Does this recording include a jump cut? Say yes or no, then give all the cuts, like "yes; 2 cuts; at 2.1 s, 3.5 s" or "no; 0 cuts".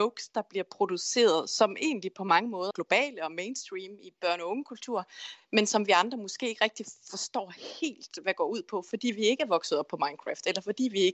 yes; 1 cut; at 2.7 s